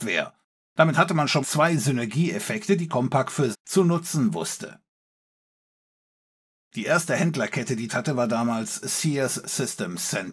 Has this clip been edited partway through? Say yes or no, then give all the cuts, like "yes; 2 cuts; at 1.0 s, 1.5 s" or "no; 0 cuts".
yes; 4 cuts; at 1.4 s, 3.5 s, 7.9 s, 9.4 s